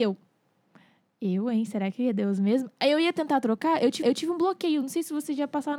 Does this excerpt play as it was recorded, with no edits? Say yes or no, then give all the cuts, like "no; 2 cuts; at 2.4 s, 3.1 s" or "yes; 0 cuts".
no; 1 cut; at 4.0 s